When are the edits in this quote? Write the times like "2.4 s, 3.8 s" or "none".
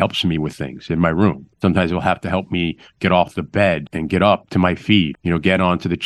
1.5 s, 3.9 s, 5.1 s

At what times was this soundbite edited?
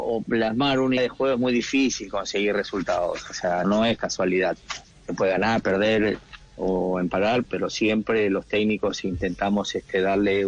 1.0 s, 3.6 s, 7.5 s

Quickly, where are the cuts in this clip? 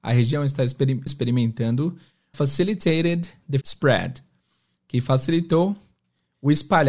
1.1 s, 2.3 s, 3.6 s

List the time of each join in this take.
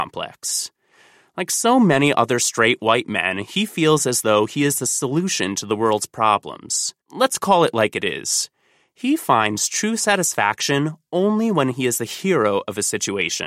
7.0 s

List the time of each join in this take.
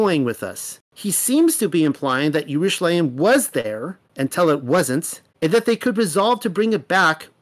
4.1 s, 5.3 s

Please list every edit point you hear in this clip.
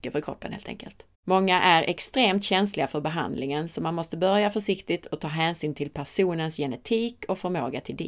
1.1 s

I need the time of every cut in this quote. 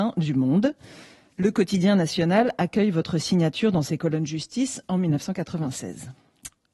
none

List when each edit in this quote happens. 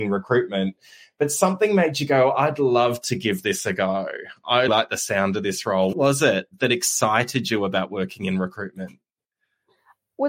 4.7 s, 5.9 s

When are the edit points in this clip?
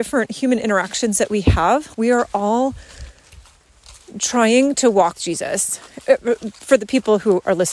1.9 s, 5.2 s

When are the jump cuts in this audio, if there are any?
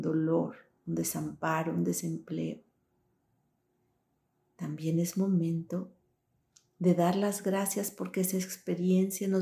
none

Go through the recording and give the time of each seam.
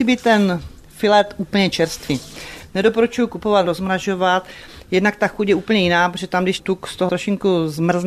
3.7 s, 6.6 s, 7.1 s

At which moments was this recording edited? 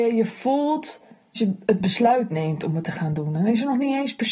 1.3 s

